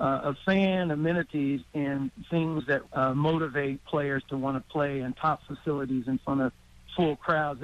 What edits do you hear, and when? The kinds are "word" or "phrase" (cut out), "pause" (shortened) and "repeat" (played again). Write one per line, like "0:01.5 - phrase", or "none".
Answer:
0:02.8 - word